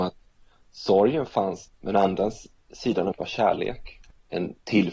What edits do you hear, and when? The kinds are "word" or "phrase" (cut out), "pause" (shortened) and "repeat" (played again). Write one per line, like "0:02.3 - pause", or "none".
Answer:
0:01.7 - word
0:03.1 - word